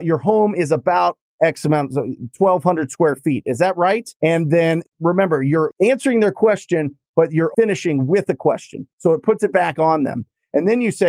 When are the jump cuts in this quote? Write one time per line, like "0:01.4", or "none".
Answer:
0:04.1
0:07.5
0:08.9